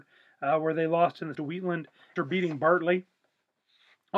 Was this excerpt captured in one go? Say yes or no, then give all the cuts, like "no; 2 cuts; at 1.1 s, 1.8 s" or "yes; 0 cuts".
no; 2 cuts; at 1.3 s, 2.2 s